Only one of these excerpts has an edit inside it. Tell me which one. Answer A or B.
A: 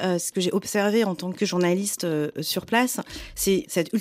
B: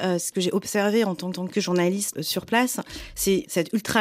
B